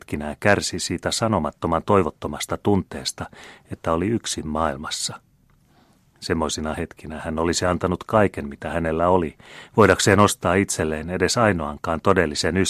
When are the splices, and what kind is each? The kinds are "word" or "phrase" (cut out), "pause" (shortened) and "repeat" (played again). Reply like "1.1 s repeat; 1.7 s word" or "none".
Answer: none